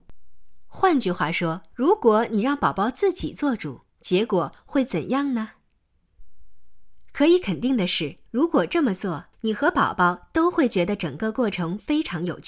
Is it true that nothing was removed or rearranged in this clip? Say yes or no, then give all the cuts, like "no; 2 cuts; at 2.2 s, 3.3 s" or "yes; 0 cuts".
no; 4 cuts; at 1.7 s, 3.9 s, 8.3 s, 9.3 s